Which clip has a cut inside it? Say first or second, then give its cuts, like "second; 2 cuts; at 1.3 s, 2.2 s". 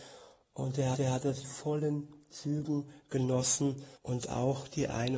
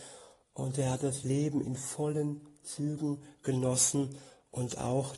first; 3 cuts; at 0.9 s, 1.4 s, 4.0 s